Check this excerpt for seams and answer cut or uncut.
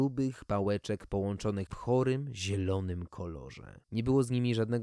cut